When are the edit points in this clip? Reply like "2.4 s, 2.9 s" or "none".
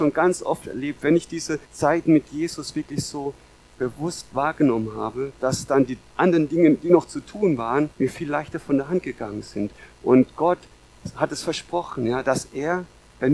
1.7 s, 7.9 s